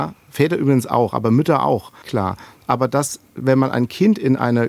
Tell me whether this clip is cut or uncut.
cut